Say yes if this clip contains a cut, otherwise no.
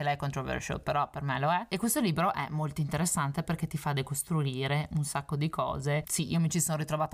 no